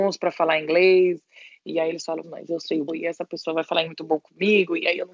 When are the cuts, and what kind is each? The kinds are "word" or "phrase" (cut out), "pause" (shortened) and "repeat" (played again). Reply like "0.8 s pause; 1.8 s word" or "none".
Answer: 2.2 s phrase; 2.9 s word; 3.9 s word